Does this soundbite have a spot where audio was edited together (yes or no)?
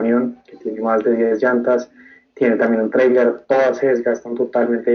no